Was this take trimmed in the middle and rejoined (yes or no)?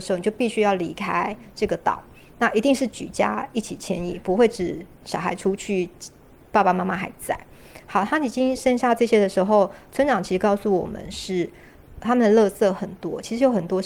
no